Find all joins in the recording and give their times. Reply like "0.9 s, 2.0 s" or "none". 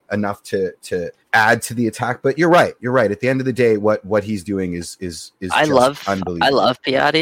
1.2 s

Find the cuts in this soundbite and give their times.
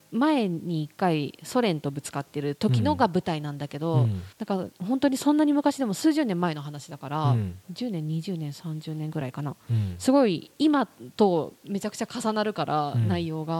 4.3 s

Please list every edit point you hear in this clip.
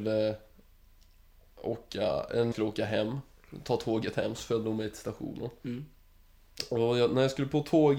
2.5 s

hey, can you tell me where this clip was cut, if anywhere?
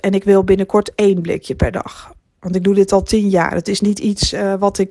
none

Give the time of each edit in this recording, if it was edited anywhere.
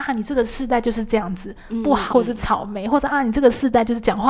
2.1 s

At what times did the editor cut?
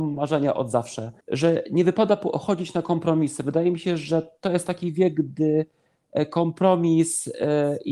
1.2 s

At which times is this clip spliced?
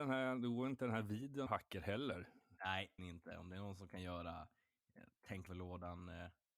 1.5 s, 3.0 s, 5.5 s

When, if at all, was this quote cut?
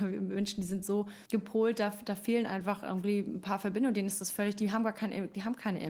1.3 s

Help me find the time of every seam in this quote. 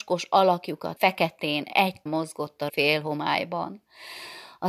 1.0 s, 2.1 s, 2.7 s

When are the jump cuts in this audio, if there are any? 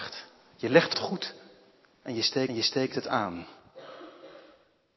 0.9 s, 2.5 s

